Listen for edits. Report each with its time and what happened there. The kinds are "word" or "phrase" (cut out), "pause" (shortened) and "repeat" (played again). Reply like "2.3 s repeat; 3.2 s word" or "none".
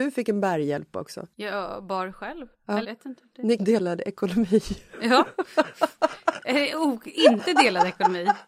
1.3 s pause; 2.5 s pause; 2.8 s word; 3.6 s word